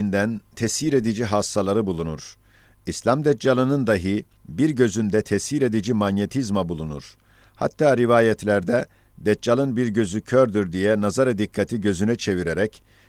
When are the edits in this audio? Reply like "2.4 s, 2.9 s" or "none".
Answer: none